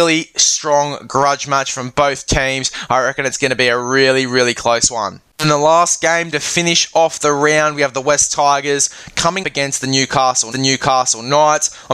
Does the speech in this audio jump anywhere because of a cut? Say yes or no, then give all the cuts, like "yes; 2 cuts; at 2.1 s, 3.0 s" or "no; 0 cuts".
yes; 3 cuts; at 5.3 s, 9.4 s, 10.5 s